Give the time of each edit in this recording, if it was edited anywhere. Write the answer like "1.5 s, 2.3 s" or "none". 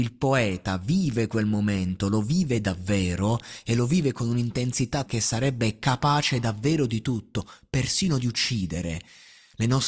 5.1 s